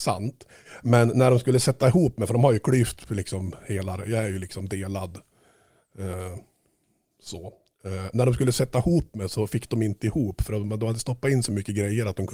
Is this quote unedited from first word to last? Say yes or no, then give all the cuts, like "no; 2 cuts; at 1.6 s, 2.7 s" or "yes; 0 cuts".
yes; 0 cuts